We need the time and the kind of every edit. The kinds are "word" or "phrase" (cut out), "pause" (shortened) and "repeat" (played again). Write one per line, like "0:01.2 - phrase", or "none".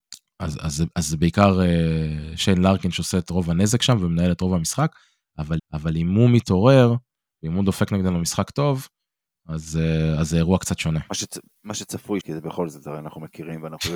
0:05.6 - repeat
0:12.2 - word

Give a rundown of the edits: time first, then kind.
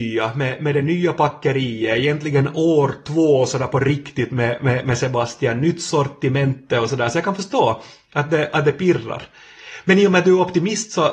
none

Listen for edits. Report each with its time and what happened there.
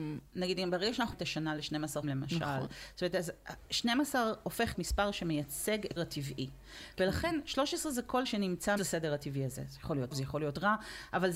0:01.1 - word
0:02.0 - word
0:04.7 - word
0:06.0 - word
0:08.2 - word
0:08.8 - word
0:10.1 - word

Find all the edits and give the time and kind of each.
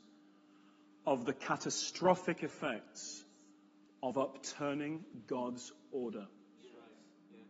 none

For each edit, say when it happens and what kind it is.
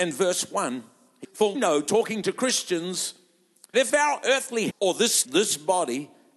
0:01.2 - word
0:01.5 - word
0:03.7 - word
0:04.7 - word
0:05.2 - word

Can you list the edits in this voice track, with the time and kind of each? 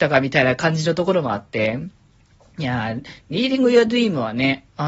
none

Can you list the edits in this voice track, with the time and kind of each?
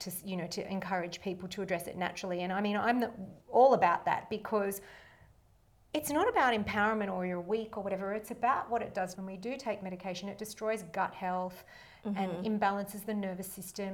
0:03.4 - pause
0:09.1 - phrase

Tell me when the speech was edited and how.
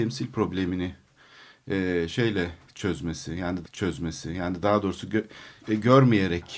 0:03.6 - repeat
0:05.6 - pause

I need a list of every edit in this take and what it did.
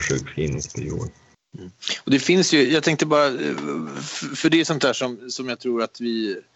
0:01.3 - pause

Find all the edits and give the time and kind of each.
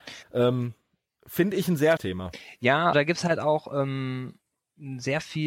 0:02.0 - word
0:02.9 - word

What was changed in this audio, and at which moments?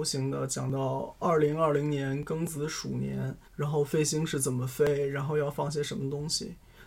0:03.4 - pause

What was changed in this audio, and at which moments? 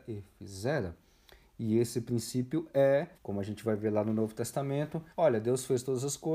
0:03.1 - pause
0:05.1 - pause

